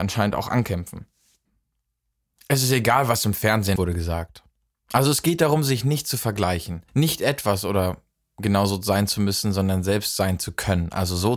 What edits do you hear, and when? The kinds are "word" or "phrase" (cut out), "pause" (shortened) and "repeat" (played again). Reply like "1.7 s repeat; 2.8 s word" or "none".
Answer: 3.8 s word; 6.9 s pause